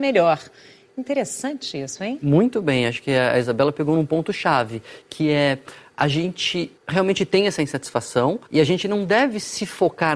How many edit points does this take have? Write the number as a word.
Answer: two